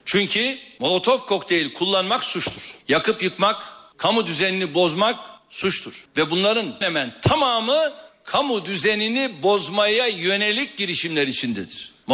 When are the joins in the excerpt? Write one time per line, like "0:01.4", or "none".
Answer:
0:02.8
0:06.8